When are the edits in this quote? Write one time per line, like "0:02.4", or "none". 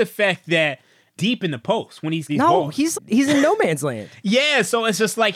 0:01.2
0:02.3
0:02.9